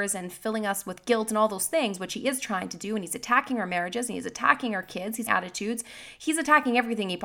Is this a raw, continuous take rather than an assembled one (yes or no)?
no